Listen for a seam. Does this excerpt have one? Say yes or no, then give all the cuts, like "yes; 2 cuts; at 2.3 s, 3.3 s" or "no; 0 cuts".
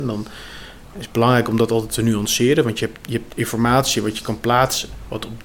no; 0 cuts